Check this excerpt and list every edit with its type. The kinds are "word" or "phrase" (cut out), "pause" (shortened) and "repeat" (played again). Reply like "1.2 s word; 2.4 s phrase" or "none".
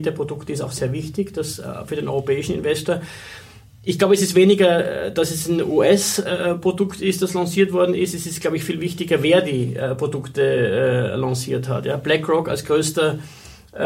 none

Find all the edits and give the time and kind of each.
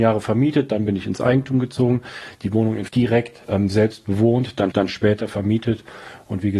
2.9 s word; 3.4 s pause; 4.7 s repeat

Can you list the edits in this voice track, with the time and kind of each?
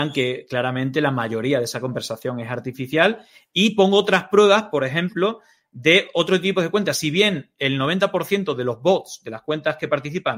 none

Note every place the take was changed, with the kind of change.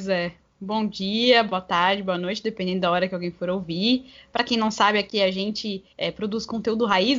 5.9 s pause

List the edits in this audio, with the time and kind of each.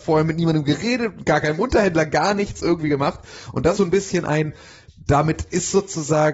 3.8 s word

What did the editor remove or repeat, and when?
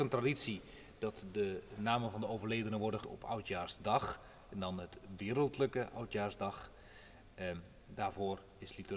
3.0 s word

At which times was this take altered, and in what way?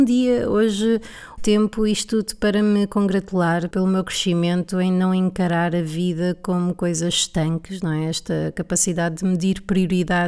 1.4 s word; 3.7 s word

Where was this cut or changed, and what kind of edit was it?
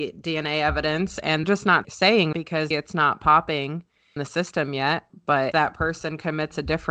1.4 s word; 1.8 s word; 2.3 s word; 2.7 s word; 4.2 s word; 5.5 s word

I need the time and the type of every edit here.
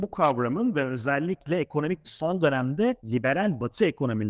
2.0 s word; 3.0 s pause

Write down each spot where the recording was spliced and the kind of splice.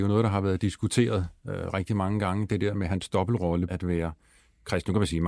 2.9 s word; 3.7 s word

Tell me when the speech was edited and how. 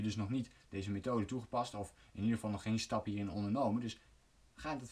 none

